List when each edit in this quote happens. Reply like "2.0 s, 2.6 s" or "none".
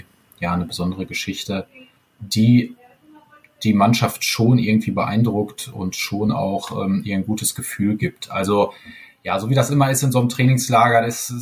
none